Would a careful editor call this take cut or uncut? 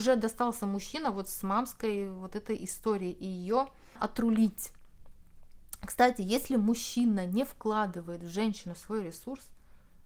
cut